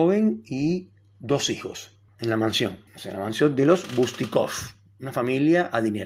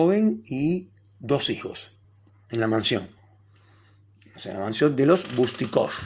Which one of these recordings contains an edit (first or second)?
first